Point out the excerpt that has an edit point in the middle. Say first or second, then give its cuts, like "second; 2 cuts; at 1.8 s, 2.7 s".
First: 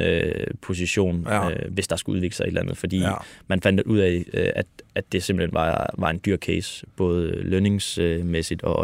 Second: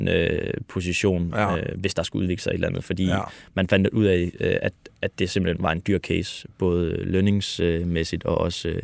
second; 1 cut; at 5.6 s